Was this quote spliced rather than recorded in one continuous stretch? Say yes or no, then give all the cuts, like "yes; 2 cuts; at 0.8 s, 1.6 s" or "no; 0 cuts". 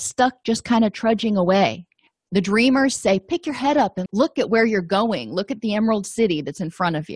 yes; 1 cut; at 4.1 s